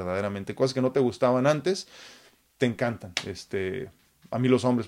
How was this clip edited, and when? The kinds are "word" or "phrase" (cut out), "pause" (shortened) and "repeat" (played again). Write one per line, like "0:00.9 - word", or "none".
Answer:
none